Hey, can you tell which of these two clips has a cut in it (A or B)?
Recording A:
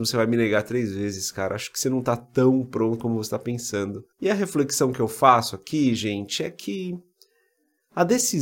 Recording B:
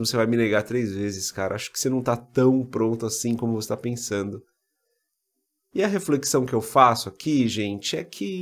A